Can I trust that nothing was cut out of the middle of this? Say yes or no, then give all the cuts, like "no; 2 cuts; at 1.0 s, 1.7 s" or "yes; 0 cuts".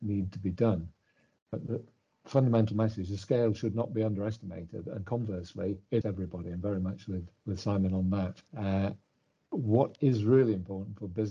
no; 3 cuts; at 6.0 s, 7.4 s, 8.5 s